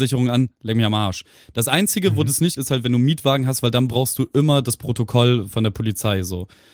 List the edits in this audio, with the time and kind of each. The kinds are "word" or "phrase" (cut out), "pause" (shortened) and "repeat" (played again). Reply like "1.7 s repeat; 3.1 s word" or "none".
2.6 s word; 5.5 s word